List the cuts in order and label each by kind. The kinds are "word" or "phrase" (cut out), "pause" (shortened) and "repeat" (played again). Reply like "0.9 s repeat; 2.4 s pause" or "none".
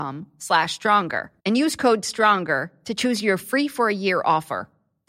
1.4 s pause